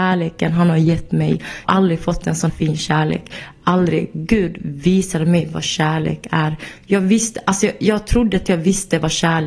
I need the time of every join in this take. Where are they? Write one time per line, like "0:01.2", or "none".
0:01.6
0:02.5

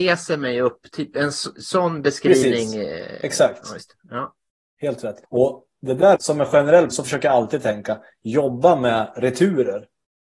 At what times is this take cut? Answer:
0:05.2
0:06.2
0:06.9

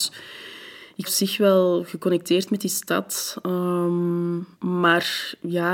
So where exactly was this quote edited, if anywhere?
0:01.0
0:04.5

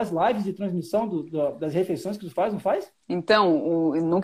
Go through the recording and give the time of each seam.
0:03.0

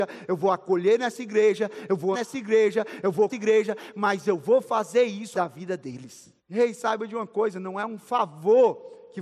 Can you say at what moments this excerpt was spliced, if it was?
0:02.1
0:03.3
0:05.3
0:06.4

